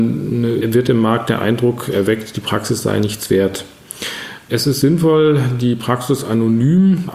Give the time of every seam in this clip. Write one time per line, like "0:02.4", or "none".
none